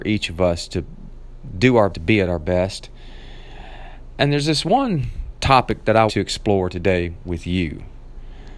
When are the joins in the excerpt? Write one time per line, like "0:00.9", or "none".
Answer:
0:01.9
0:06.1